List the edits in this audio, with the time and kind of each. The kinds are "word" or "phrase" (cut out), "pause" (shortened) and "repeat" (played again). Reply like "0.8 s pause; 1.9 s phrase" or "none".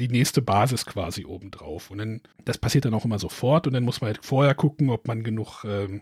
2.3 s pause

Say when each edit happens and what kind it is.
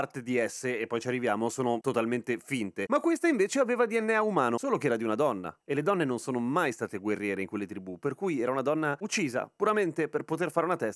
5.6 s pause

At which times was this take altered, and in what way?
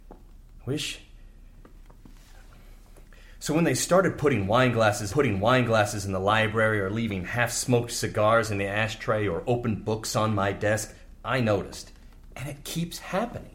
5.1 s repeat

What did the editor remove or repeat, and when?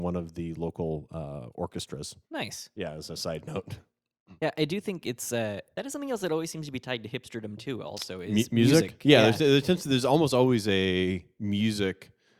2.2 s pause; 4.4 s pause; 5.7 s pause

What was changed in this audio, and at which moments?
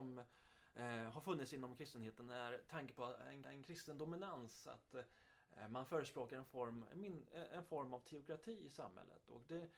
3.4 s repeat

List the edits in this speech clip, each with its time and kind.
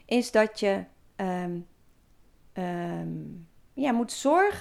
none

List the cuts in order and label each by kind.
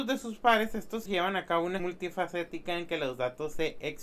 1.1 s word; 1.8 s word

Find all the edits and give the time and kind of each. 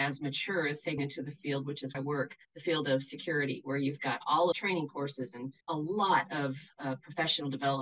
1.0 s word; 1.9 s word; 2.4 s pause; 4.5 s phrase; 5.6 s pause

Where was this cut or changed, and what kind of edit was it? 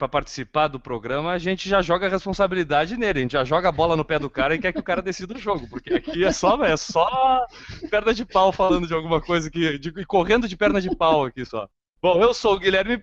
none

